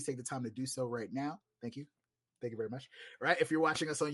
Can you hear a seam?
no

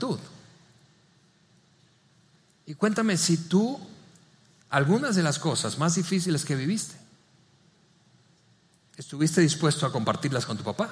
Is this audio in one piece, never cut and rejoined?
yes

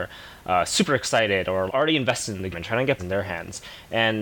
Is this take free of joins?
no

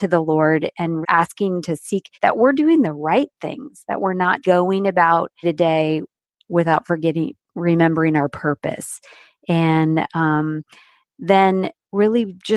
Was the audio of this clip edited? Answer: yes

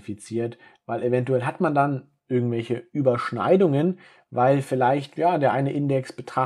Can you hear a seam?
no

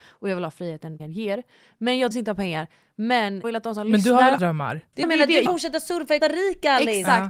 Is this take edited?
yes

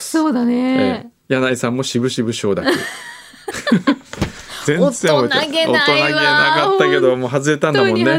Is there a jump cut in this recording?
yes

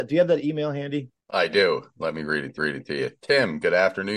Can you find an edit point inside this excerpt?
yes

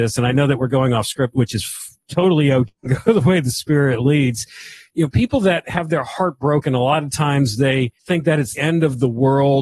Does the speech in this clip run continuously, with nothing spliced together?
no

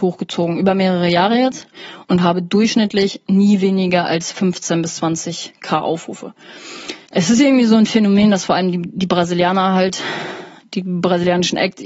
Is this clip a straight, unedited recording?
no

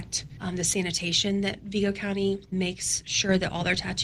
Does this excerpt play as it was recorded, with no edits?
no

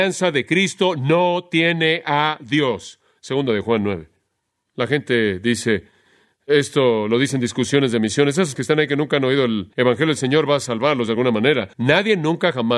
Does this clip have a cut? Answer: yes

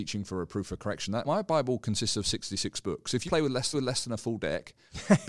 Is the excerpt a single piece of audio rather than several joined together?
no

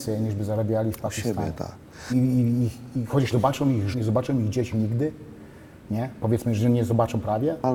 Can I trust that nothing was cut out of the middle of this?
no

